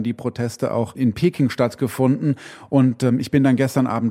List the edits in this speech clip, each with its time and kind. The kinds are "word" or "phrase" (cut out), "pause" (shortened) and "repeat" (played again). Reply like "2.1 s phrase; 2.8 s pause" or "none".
none